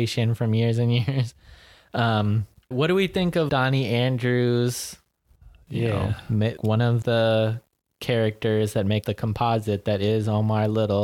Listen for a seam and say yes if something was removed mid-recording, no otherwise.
yes